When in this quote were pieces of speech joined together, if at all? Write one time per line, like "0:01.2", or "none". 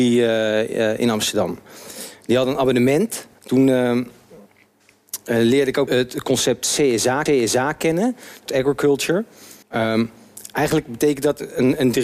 0:03.3
0:05.9
0:07.3
0:08.5
0:09.6

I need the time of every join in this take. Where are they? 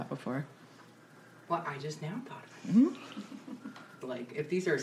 none

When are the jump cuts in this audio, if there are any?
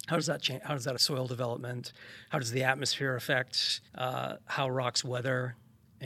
0:01.0
0:03.9

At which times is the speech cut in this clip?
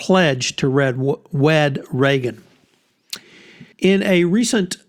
0:03.7

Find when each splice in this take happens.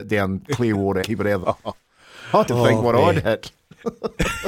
0:01.0
0:01.4
0:02.5

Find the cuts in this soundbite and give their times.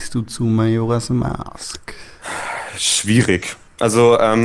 none

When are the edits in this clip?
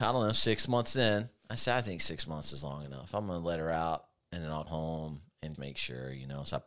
0:04.7
0:05.6

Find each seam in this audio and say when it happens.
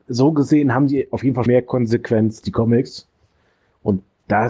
0:01.5
0:02.4

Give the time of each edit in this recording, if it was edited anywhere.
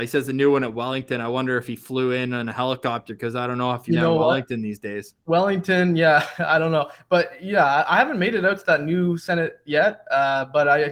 0:03.9

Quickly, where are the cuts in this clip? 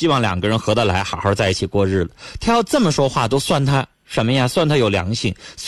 0:03.9

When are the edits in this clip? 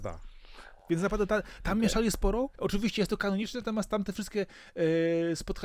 0:02.5

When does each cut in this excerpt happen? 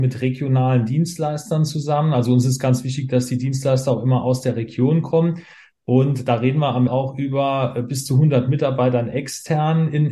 0:06.9

